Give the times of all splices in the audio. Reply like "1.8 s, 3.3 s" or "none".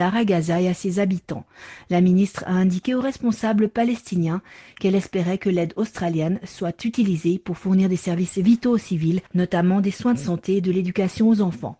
9.3 s